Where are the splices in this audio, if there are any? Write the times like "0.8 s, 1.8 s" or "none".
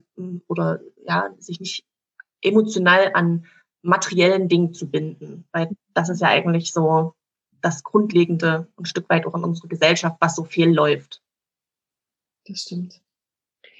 none